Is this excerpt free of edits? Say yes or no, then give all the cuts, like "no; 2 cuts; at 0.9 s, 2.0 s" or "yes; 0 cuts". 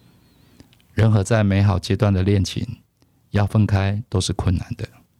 yes; 0 cuts